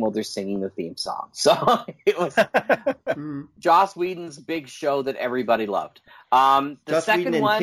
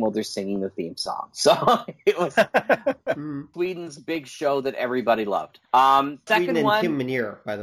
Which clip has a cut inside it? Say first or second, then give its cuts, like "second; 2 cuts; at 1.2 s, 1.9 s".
second; 3 cuts; at 3.5 s, 5.6 s, 6.3 s